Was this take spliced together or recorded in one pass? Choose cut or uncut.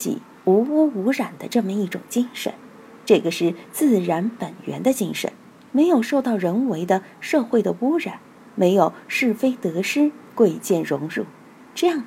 uncut